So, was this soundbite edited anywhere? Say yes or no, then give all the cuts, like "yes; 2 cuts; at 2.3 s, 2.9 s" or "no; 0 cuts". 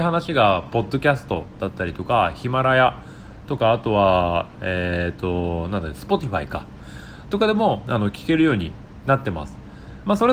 no; 0 cuts